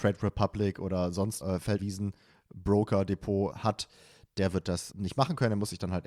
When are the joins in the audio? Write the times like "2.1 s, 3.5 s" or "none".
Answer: 1.4 s, 1.8 s, 3.5 s, 4.9 s